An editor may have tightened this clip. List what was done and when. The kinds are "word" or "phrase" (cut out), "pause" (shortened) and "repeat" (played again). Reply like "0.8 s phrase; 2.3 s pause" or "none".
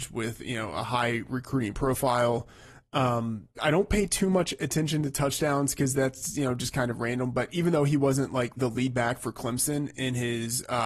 3.5 s pause; 8.6 s word